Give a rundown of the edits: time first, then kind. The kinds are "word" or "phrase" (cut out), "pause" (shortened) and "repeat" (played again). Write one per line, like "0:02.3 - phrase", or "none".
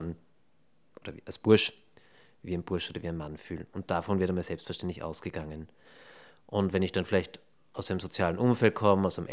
none